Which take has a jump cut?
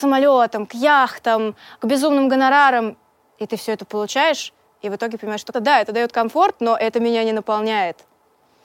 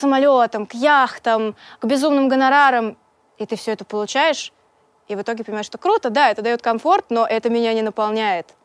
first; 2 cuts; at 4.7 s, 5.5 s

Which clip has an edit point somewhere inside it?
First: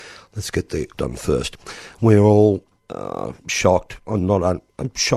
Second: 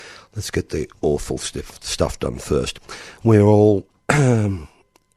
first; 2 cuts; at 1.0 s, 2.8 s

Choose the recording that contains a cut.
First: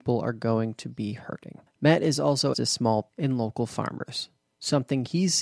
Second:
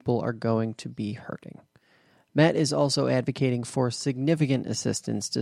first; 3 cuts; at 1.7 s, 2.5 s, 3.1 s

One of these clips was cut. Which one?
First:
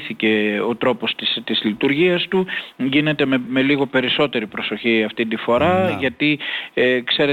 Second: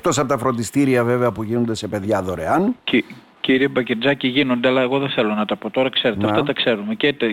first; 1 cut; at 3.5 s

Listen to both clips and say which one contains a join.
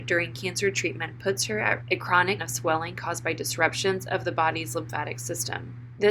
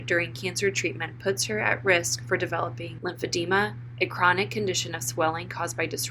first; 2 cuts; at 1.8 s, 2.4 s

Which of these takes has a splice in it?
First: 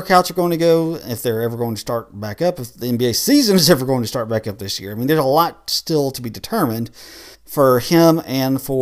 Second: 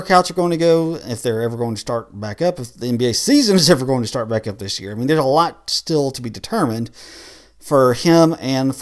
first; 1 cut; at 7.3 s

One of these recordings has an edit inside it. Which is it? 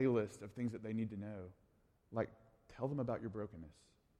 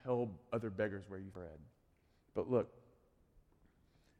second; 1 cut; at 1.3 s

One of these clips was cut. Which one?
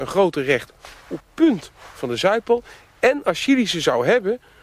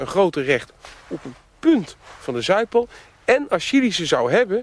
first; 1 cut; at 1.2 s

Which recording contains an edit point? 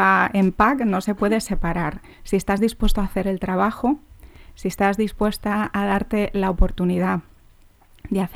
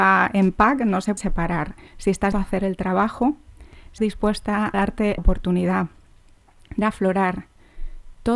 second; 6 cuts; at 1.2 s, 2.3 s, 4.0 s, 4.7 s, 5.2 s, 6.8 s

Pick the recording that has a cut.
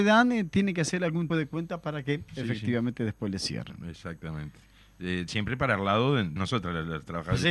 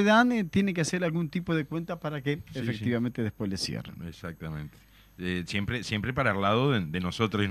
first; 3 cuts; at 1.3 s, 5.3 s, 6.4 s

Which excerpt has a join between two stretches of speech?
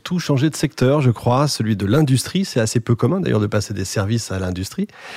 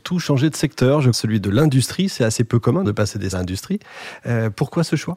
second; 3 cuts; at 1.1 s, 2.8 s, 3.3 s

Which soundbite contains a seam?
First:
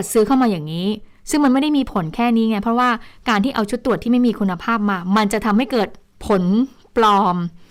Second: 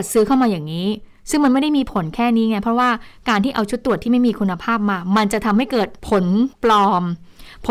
second; 2 cuts; at 6.0 s, 6.5 s

